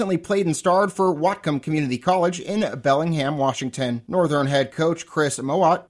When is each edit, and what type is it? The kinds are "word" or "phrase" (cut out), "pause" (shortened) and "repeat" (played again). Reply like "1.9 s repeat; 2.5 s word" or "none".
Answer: none